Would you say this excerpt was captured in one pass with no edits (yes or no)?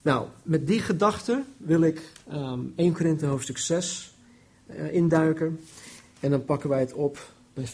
yes